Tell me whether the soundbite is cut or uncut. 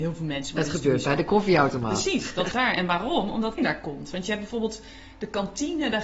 cut